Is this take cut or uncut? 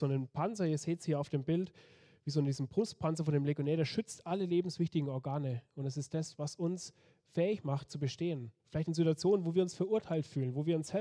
cut